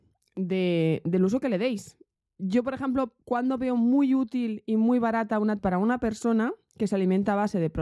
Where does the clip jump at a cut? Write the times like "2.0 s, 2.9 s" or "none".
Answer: 3.2 s, 5.6 s